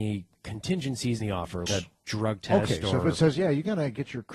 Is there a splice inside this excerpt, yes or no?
yes